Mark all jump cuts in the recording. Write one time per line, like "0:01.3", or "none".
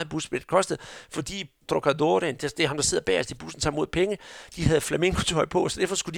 0:01.7
0:02.4